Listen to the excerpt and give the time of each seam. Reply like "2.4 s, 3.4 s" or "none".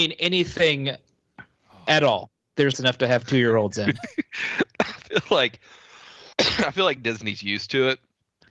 2.7 s, 6.3 s